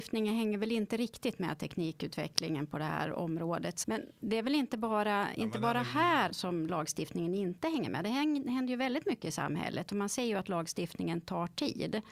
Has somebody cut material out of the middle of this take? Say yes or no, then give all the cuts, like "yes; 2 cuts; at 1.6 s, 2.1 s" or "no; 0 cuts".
yes; 2 cuts; at 3.8 s, 6.3 s